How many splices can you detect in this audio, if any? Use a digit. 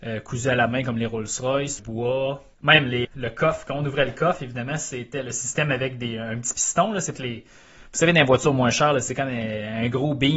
4